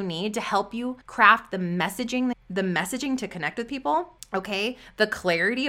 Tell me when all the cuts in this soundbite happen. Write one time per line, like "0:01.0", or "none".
0:01.0
0:02.3
0:04.2